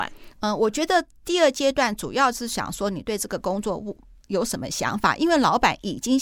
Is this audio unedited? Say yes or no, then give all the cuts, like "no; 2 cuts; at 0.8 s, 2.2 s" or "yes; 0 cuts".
yes; 0 cuts